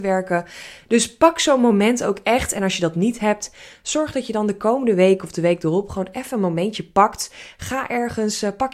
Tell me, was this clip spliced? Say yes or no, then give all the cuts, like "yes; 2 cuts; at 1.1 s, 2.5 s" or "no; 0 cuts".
no; 0 cuts